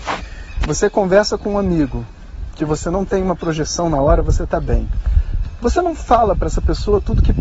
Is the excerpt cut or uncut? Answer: uncut